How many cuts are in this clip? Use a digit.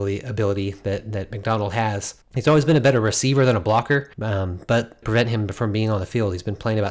3